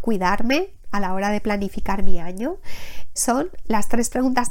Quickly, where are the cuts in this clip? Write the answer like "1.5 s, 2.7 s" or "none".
3.2 s